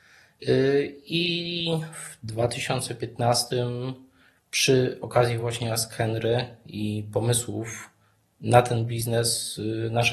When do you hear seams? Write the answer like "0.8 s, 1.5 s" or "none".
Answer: none